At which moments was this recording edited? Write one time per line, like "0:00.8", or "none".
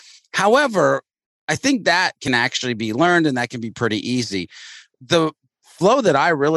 none